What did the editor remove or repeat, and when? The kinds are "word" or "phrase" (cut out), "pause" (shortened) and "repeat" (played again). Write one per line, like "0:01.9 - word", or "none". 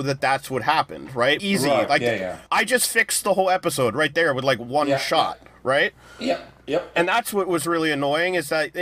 0:01.4 - word
0:02.5 - pause